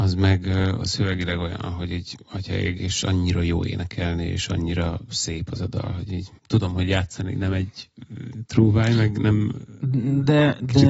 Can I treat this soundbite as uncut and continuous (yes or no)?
no